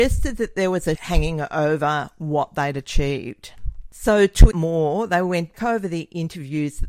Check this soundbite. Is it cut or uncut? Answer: cut